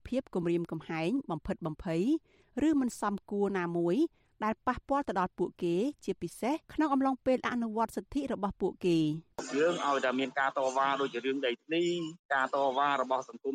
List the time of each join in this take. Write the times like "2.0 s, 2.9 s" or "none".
6.6 s